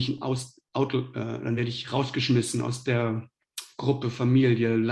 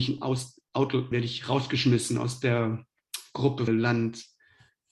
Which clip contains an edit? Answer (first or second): second